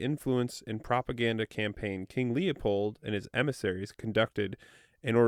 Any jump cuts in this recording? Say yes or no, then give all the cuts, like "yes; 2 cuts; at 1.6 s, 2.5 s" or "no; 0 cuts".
no; 0 cuts